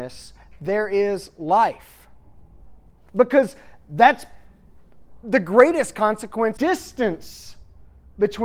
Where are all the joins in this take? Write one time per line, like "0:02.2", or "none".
0:06.6

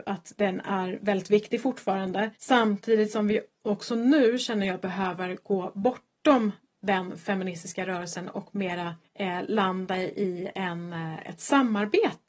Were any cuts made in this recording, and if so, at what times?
0:02.4
0:09.0

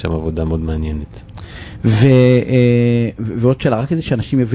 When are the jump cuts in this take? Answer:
none

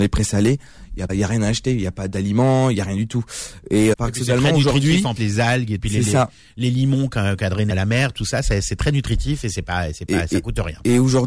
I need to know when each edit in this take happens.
0:01.1
0:03.9
0:05.2
0:05.8
0:07.7

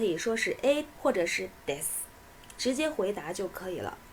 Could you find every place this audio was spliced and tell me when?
0:00.9
0:01.6

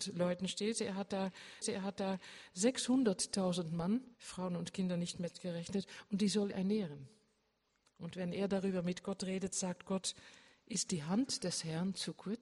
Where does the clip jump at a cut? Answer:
0:01.6
0:04.1
0:06.5

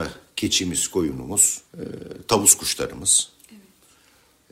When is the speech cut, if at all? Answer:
0:01.7

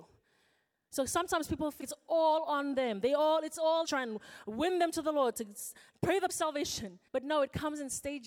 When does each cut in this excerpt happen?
0:01.8
0:03.8
0:06.3
0:07.1

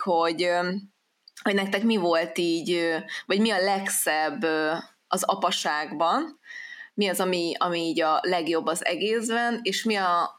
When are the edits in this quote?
none

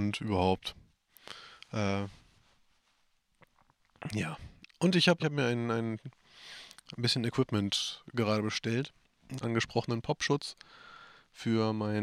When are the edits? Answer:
0:05.2
0:09.4

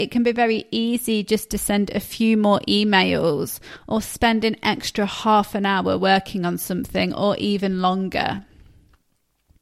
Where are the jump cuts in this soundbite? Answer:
none

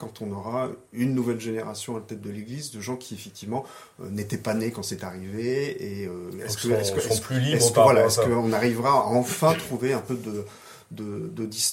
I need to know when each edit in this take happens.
none

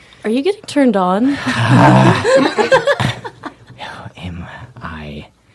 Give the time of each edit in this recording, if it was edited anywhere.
none

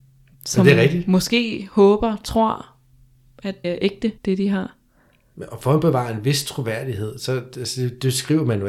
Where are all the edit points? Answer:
0:03.6
0:04.2

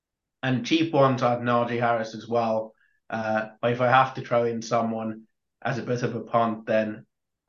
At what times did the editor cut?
none

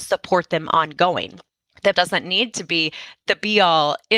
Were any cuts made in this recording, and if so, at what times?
0:01.9

